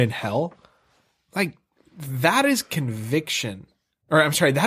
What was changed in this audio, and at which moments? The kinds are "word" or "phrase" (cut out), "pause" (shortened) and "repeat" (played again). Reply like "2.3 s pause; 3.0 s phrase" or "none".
none